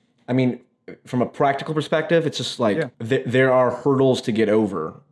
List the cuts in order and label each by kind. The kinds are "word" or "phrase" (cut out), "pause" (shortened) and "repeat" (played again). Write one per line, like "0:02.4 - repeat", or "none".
0:02.9 - pause